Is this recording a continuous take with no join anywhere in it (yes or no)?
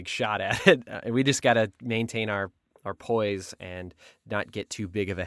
yes